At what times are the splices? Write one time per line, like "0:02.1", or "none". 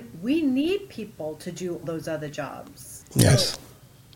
0:01.8
0:03.0